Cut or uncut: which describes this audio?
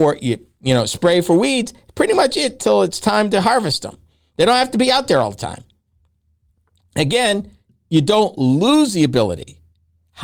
uncut